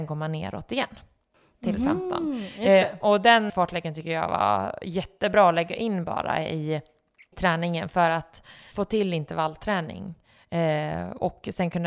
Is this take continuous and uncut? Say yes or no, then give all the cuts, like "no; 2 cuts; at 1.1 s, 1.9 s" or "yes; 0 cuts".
no; 3 cuts; at 3.5 s, 7.3 s, 8.7 s